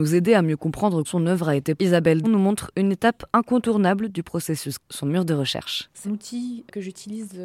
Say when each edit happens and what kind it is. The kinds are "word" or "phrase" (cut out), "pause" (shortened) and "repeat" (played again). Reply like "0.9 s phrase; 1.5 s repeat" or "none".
1.0 s word; 1.8 s word; 2.2 s word; 4.8 s word; 6.0 s word